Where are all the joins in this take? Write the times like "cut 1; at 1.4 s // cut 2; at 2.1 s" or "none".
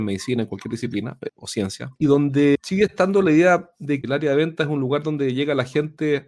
cut 1; at 1.3 s // cut 2; at 4.0 s

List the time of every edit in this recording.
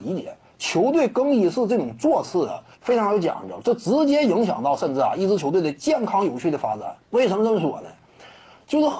cut 1; at 2.7 s // cut 2; at 7.0 s

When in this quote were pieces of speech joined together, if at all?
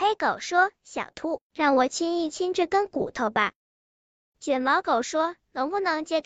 cut 1; at 3.6 s

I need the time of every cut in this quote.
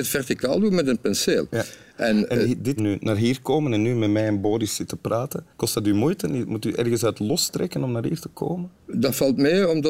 cut 1; at 2.8 s // cut 2; at 5.5 s

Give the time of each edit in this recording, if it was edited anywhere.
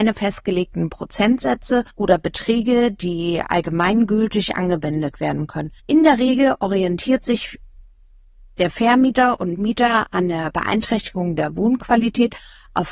cut 1; at 1.9 s // cut 2; at 5.8 s

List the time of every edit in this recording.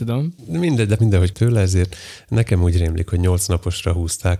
cut 1; at 1.0 s // cut 2; at 1.3 s

